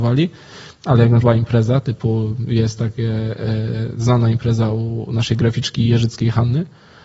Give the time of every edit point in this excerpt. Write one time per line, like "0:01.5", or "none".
0:01.2